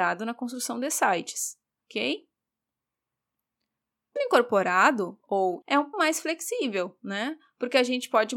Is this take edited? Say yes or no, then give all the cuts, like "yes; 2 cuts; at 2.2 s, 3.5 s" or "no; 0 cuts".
yes; 3 cuts; at 4.2 s, 5.6 s, 5.9 s